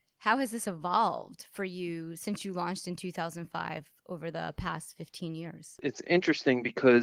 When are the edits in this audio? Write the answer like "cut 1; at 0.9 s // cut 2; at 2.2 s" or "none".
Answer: none